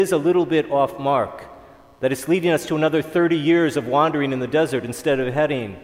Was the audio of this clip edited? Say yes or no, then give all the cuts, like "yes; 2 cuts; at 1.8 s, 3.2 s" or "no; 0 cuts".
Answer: no; 0 cuts